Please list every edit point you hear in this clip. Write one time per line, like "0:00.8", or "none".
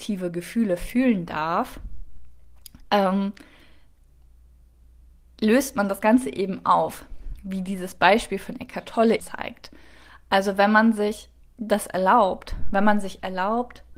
0:09.2
0:11.4